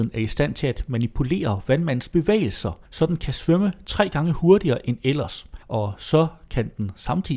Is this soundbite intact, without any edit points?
no; 2 cuts; at 2.9 s, 5.6 s

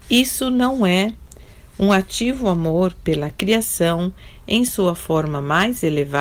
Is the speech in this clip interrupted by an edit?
no; 0 cuts

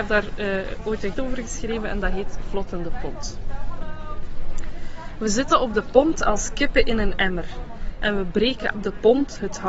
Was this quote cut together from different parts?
yes; 2 cuts; at 1.1 s, 8.7 s

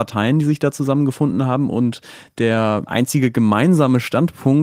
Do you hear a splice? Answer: no; 0 cuts

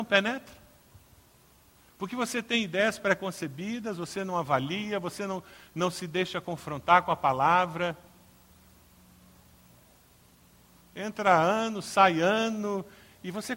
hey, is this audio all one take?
yes; 0 cuts

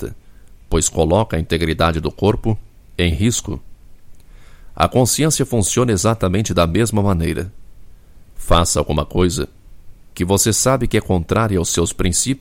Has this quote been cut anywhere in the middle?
no; 0 cuts

